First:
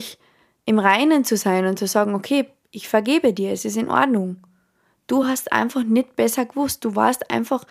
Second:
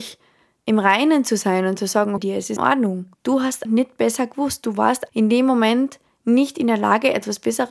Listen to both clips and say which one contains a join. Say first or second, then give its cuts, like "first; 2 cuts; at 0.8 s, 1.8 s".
second; 5 cuts; at 2.2 s, 2.6 s, 3.1 s, 3.6 s, 5.1 s